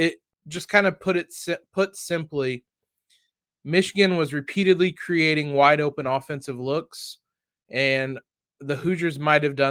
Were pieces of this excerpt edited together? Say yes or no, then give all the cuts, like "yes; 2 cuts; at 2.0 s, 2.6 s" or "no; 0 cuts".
no; 0 cuts